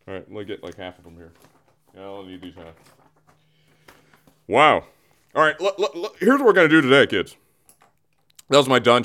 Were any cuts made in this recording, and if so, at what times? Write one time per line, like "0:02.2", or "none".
none